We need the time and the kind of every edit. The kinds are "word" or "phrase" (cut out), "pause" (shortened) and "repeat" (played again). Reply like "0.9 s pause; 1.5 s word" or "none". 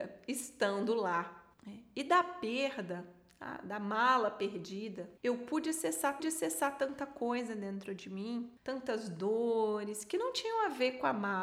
1.5 s pause; 5.2 s pause; 6.2 s repeat; 8.6 s pause